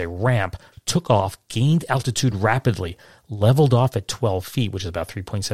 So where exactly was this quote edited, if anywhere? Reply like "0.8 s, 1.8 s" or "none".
none